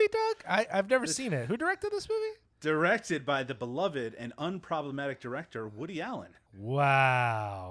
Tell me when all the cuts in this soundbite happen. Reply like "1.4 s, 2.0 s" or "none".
6.5 s